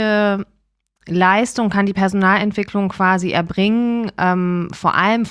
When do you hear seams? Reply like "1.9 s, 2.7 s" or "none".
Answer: none